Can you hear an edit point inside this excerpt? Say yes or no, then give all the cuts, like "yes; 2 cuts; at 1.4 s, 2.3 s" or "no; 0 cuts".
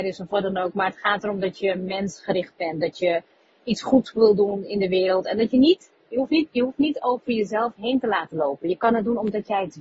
no; 0 cuts